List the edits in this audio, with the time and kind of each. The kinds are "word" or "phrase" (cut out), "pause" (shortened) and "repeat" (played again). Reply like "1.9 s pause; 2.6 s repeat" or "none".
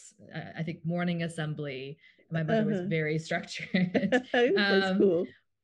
none